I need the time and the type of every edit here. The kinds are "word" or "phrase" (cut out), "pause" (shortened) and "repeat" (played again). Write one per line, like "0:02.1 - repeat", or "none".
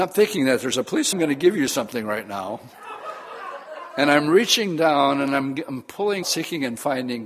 0:01.1 - phrase
0:06.2 - word